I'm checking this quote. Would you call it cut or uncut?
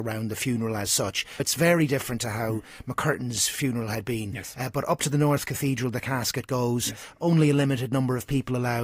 cut